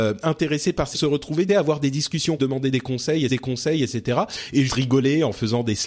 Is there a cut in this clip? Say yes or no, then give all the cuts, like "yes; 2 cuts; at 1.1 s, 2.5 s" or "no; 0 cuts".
yes; 5 cuts; at 0.9 s, 1.5 s, 2.4 s, 3.3 s, 4.7 s